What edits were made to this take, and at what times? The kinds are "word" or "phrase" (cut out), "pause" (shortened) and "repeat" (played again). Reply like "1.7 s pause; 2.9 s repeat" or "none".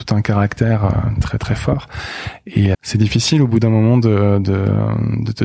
1.2 s word; 2.7 s word